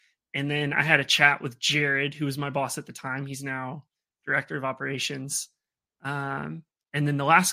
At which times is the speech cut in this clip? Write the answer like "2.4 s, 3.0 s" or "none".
none